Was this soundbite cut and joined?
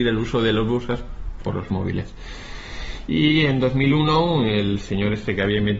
yes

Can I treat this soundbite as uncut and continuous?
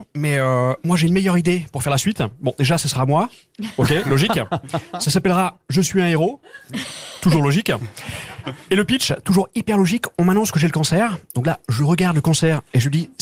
yes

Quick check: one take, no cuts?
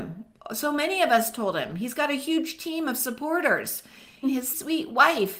no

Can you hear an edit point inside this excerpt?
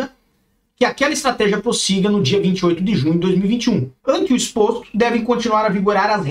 yes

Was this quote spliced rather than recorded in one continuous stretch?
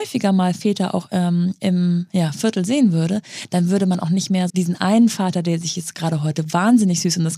yes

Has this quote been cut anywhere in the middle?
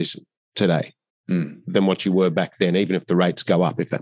no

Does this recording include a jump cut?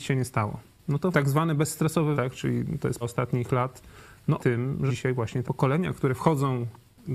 yes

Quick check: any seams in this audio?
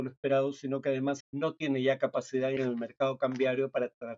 yes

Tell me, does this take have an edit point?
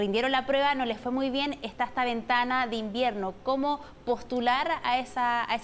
no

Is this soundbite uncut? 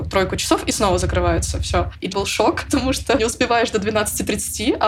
no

